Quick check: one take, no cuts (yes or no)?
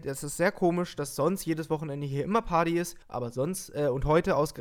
no